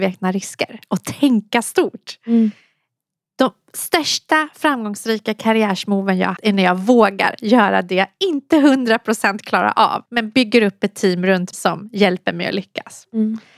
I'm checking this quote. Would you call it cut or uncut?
cut